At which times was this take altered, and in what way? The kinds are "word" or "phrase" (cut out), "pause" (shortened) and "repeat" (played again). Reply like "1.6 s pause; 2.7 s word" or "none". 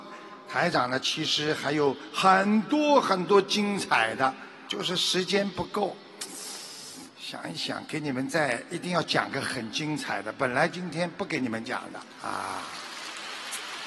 4.7 s word; 12.1 s pause